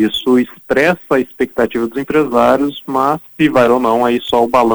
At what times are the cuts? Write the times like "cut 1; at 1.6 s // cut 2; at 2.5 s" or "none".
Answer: cut 1; at 3.3 s // cut 2; at 3.7 s